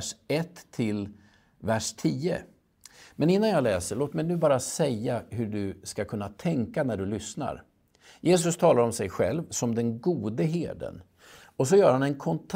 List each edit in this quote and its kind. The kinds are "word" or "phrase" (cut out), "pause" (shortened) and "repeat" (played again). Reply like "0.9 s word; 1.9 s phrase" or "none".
none